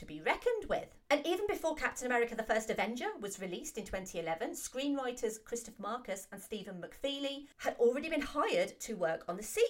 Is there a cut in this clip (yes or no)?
yes